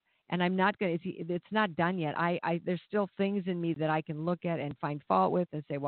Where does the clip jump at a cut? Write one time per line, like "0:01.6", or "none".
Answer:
none

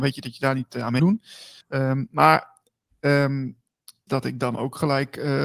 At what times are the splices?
0:01.0
0:01.6
0:04.1

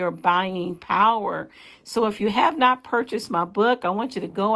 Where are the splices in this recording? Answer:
none

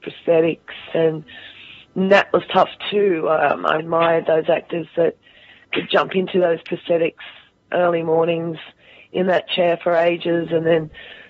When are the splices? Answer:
0:03.8

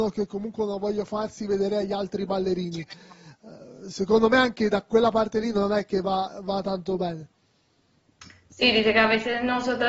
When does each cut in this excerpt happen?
none

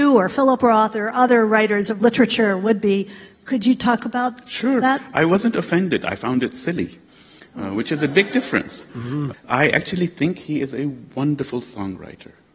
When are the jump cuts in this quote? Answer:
none

